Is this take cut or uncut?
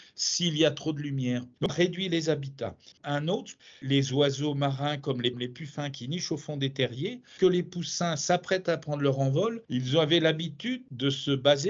cut